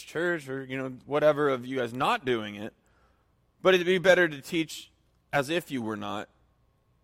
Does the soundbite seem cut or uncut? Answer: uncut